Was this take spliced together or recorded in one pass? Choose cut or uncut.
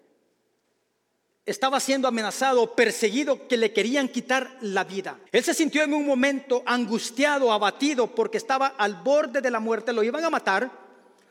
cut